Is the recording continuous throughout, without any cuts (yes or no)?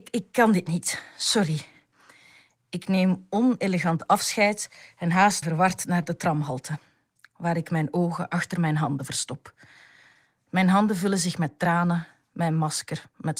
no